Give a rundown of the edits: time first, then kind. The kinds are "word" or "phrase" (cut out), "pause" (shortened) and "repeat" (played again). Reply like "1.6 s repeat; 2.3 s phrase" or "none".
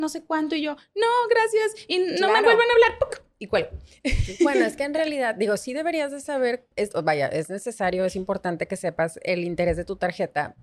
6.7 s pause